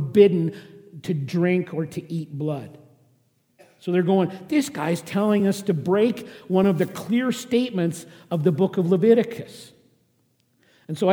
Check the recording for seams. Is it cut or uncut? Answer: uncut